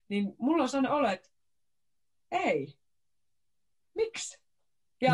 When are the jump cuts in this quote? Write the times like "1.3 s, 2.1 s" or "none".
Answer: none